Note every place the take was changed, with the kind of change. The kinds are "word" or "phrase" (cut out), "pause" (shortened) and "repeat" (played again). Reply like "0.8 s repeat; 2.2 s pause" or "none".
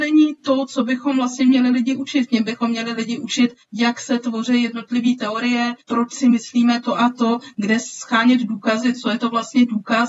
3.6 s pause; 5.8 s pause